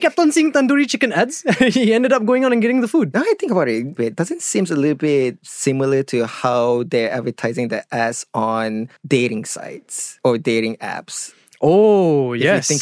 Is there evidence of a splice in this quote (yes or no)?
no